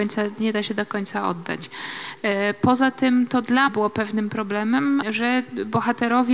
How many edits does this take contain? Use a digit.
2